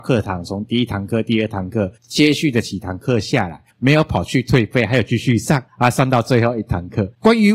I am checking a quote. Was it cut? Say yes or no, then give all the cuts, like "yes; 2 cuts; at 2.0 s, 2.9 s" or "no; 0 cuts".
yes; 3 cuts; at 2.0 s, 3.7 s, 5.7 s